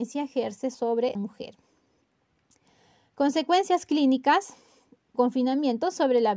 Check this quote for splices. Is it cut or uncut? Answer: cut